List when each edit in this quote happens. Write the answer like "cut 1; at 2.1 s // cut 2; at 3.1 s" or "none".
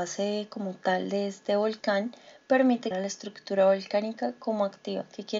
cut 1; at 2.9 s